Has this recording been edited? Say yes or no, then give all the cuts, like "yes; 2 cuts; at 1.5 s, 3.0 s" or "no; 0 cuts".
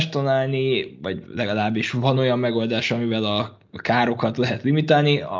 no; 0 cuts